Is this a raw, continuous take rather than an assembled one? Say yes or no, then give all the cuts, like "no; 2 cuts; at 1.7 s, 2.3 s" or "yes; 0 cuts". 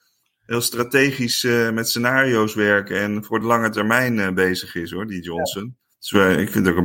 yes; 0 cuts